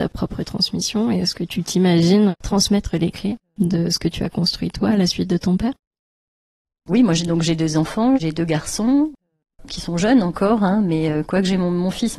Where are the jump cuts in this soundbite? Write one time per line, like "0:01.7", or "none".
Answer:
none